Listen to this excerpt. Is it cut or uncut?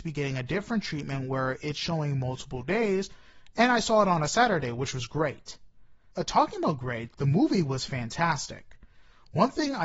cut